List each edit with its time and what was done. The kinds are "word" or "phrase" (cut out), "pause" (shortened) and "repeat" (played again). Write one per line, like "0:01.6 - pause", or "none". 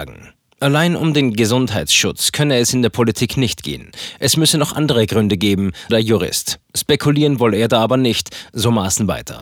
0:05.9 - word